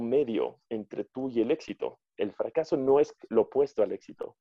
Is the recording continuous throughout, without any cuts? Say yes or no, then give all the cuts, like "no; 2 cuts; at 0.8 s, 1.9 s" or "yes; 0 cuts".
yes; 0 cuts